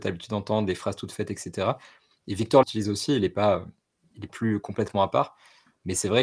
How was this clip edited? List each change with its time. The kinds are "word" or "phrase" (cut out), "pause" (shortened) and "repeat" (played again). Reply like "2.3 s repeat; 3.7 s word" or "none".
2.6 s word; 4.3 s word